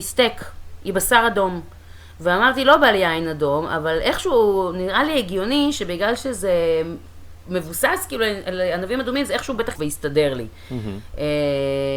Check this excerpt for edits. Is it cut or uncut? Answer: cut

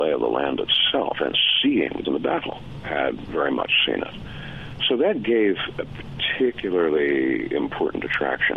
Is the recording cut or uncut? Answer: cut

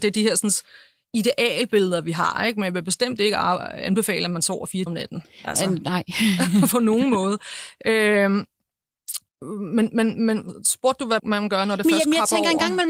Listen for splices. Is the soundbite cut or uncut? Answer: cut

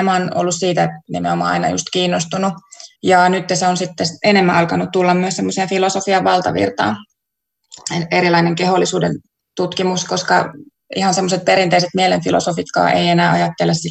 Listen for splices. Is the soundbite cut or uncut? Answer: cut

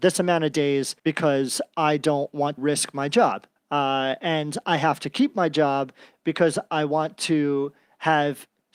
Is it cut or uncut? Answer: cut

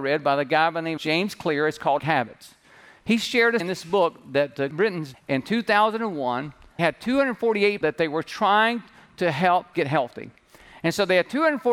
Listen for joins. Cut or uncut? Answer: cut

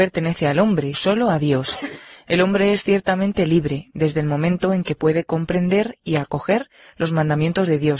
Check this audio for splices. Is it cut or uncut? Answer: cut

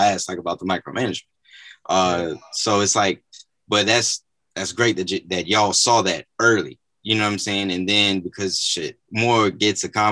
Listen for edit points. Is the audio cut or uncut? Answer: uncut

